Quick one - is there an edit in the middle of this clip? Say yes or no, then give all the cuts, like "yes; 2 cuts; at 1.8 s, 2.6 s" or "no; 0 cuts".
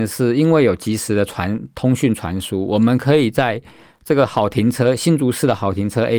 no; 0 cuts